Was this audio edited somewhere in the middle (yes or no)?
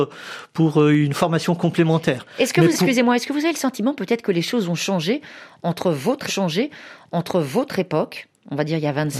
yes